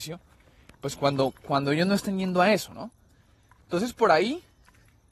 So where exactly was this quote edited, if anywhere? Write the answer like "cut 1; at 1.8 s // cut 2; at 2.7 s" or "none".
none